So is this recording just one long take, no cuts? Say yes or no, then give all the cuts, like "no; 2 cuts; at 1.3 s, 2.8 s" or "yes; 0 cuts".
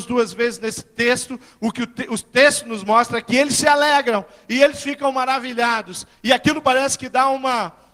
yes; 0 cuts